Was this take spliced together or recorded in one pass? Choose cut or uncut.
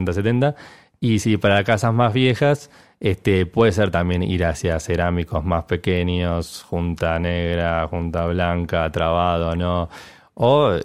uncut